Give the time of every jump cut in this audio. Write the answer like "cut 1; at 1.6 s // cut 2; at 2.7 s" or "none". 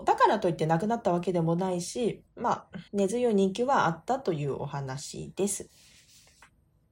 cut 1; at 2.3 s // cut 2; at 2.9 s